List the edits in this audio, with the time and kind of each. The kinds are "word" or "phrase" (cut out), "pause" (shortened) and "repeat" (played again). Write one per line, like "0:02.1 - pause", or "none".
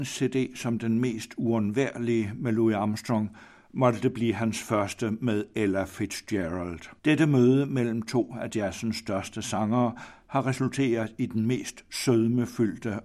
0:07.0 - pause